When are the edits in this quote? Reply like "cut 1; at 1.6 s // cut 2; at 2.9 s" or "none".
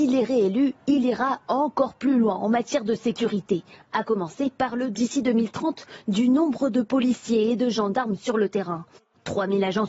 cut 1; at 4.9 s